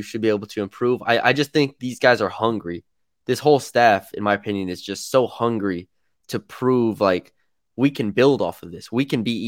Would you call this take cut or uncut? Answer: uncut